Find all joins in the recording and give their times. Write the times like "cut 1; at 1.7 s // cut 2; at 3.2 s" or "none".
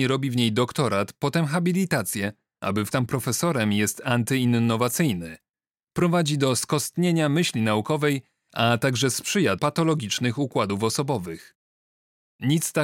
cut 1; at 2.9 s // cut 2; at 9.6 s